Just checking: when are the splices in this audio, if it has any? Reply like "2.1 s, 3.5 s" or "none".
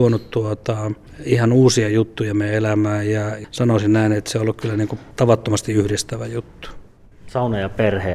5.1 s